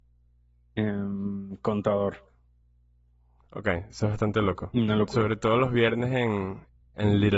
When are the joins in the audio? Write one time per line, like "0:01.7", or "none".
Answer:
none